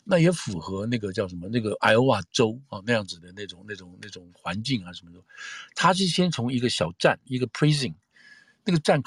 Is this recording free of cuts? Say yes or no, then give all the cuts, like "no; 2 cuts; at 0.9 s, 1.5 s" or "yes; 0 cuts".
yes; 0 cuts